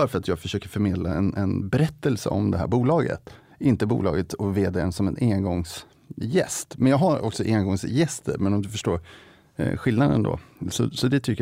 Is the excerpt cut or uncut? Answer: uncut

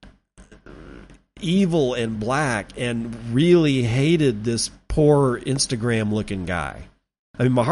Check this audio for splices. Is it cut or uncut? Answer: uncut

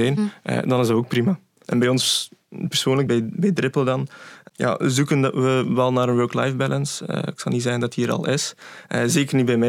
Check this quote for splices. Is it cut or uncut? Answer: cut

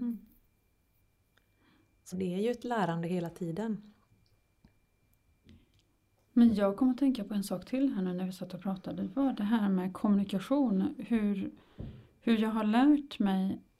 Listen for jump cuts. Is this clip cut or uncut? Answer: cut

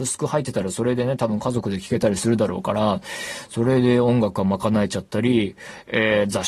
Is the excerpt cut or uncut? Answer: uncut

